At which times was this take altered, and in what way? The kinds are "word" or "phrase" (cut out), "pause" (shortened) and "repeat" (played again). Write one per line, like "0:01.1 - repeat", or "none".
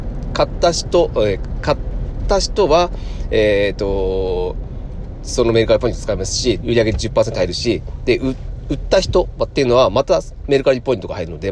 0:06.6 - word